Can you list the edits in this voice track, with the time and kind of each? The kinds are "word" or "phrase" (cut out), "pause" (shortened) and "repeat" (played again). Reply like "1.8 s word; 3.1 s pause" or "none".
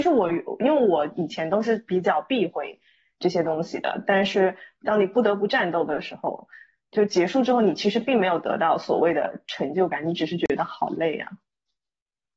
none